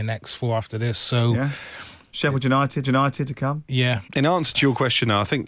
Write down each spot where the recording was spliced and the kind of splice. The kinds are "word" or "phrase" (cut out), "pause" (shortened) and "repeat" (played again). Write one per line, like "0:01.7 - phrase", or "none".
0:02.8 - repeat
0:04.1 - pause

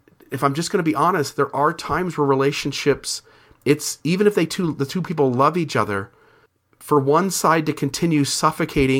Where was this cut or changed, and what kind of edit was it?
none

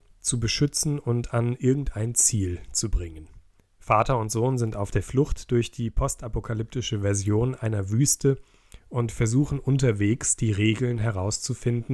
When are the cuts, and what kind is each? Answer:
0:03.6 - pause

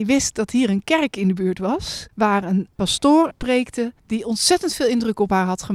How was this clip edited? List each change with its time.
0:02.1 - pause
0:02.8 - word
0:04.0 - pause

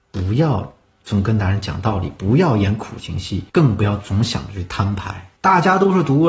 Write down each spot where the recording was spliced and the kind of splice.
0:03.5 - pause
0:05.4 - pause

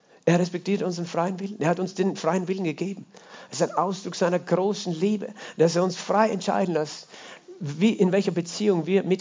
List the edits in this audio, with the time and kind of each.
none

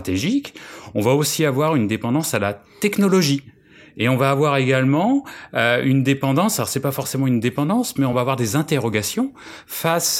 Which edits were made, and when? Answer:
none

